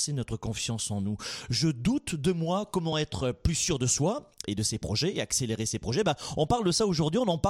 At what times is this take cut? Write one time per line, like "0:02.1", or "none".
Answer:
none